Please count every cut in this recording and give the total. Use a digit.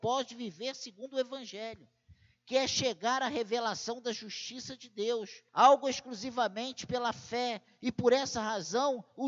1